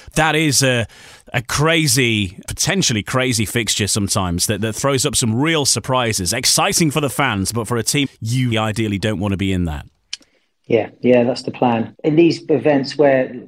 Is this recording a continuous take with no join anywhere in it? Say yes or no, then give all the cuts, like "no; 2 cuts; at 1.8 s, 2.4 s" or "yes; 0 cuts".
no; 3 cuts; at 2.4 s, 8.0 s, 8.5 s